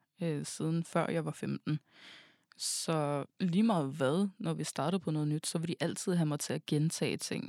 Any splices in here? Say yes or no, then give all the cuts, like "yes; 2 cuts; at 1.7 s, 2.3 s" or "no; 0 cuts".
yes; 1 cut; at 3.3 s